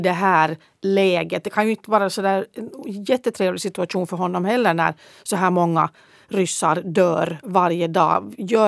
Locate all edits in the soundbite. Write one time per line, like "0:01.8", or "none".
none